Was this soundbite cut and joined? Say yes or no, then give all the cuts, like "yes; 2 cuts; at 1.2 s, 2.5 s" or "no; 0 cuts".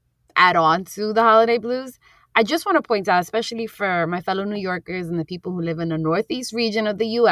no; 0 cuts